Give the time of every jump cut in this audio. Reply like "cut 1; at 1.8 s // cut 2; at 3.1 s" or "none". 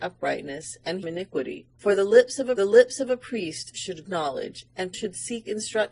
cut 1; at 1.0 s // cut 2; at 1.7 s // cut 3; at 2.6 s // cut 4; at 4.1 s // cut 5; at 4.9 s